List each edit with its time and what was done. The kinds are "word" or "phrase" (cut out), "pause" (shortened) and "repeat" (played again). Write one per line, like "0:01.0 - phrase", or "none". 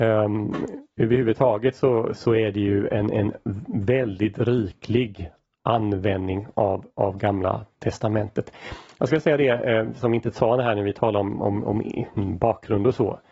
none